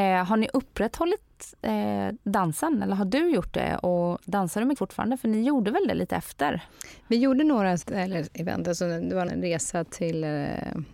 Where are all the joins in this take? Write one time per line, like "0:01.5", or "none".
0:04.8
0:07.8
0:09.3